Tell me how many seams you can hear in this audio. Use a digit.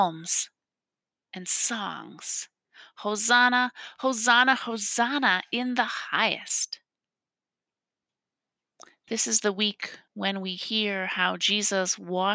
1